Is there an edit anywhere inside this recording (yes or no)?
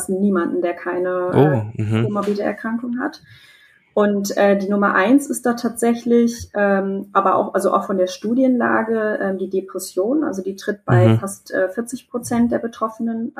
no